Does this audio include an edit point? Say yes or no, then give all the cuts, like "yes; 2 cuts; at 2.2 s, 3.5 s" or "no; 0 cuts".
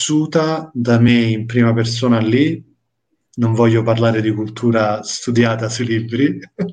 no; 0 cuts